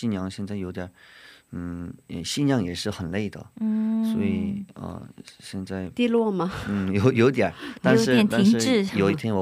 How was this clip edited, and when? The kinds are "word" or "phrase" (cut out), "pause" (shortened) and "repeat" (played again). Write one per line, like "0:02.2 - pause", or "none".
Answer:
none